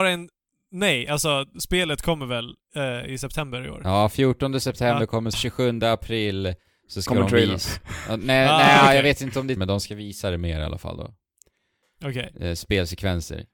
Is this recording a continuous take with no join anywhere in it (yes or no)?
no